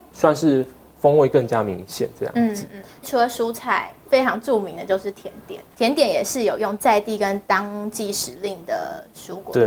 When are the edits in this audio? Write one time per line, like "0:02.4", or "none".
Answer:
none